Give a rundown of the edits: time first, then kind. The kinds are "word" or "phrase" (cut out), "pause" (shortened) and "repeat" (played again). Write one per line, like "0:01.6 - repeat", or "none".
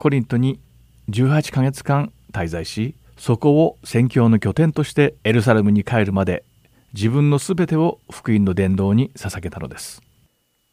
0:03.0 - pause
0:05.2 - pause